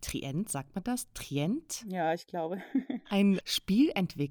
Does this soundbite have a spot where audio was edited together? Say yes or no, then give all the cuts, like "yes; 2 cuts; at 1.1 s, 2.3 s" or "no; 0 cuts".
yes; 1 cut; at 3.4 s